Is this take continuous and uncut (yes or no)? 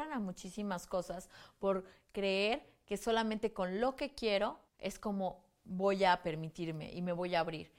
no